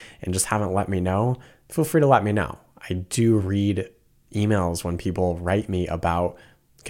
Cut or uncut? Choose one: uncut